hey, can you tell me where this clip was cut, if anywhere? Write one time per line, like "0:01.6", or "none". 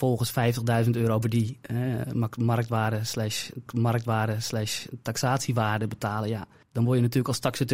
0:01.2
0:03.7
0:06.6